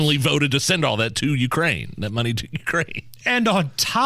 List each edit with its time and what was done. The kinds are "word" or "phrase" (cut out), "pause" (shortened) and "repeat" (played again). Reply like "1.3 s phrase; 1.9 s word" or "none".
none